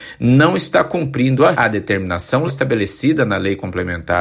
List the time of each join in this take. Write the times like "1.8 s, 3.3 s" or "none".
1.5 s, 2.5 s